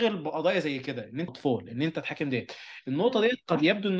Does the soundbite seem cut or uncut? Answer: cut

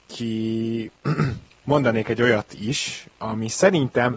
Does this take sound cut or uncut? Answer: uncut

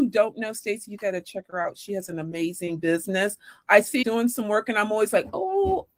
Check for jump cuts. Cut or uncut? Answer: cut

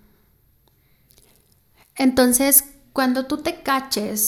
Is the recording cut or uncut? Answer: uncut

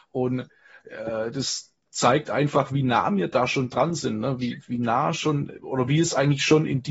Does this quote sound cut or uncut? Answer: uncut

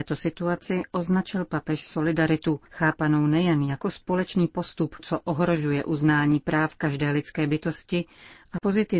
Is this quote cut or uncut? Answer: cut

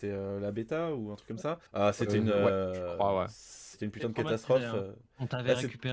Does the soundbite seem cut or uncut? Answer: cut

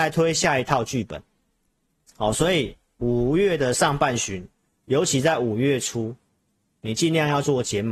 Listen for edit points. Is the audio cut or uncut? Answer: uncut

